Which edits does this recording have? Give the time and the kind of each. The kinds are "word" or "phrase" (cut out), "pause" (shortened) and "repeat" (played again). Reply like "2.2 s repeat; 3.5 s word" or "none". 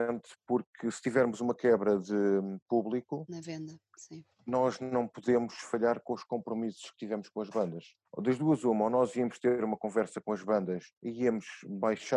4.3 s pause; 8.0 s pause; 10.9 s pause